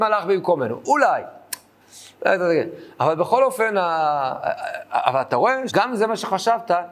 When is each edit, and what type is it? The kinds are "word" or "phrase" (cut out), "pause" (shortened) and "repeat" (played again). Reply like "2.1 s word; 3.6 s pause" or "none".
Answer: 5.7 s word

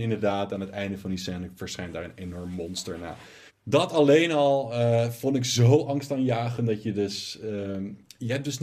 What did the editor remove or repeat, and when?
3.5 s pause

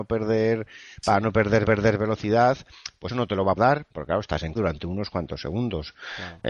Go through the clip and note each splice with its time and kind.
1.6 s repeat; 3.1 s word; 3.6 s word; 3.9 s pause; 4.6 s word

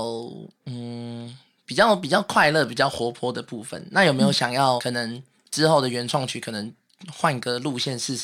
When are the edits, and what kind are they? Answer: 4.8 s word

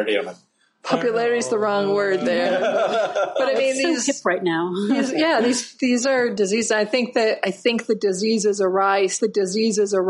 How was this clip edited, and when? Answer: 9.2 s repeat

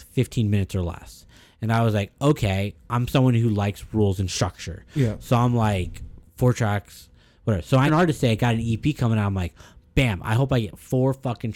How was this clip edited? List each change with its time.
7.9 s word

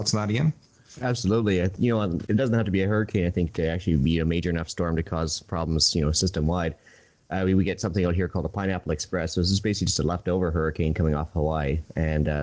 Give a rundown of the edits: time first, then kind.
none

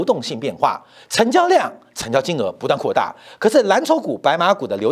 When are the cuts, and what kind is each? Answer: none

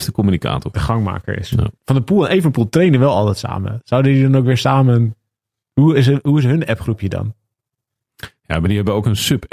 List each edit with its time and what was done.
1.8 s pause

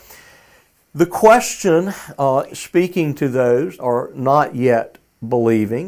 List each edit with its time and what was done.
2.5 s word; 3.8 s word

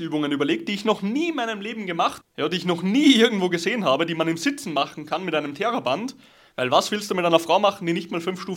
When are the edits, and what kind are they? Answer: 2.2 s word

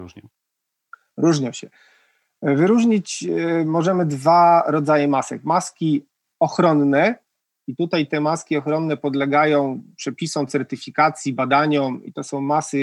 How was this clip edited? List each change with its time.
none

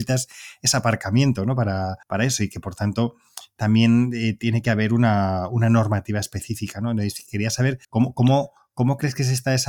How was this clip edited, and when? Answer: 2.0 s pause; 7.8 s pause

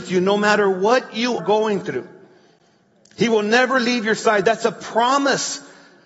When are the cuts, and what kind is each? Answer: 1.4 s word

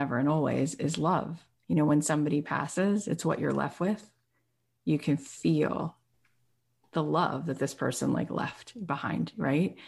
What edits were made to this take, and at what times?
none

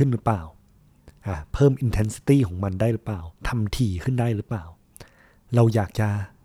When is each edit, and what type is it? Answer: 3.4 s pause

